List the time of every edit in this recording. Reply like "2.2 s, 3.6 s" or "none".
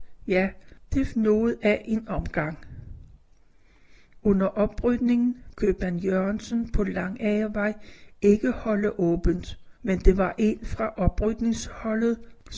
1.1 s, 5.5 s, 9.8 s